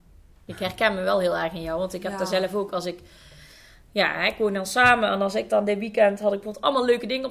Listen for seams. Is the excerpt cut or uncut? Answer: uncut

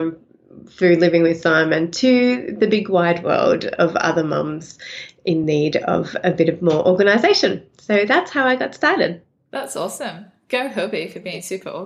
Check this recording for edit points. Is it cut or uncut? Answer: uncut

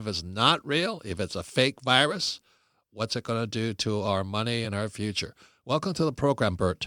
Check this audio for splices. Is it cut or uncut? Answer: uncut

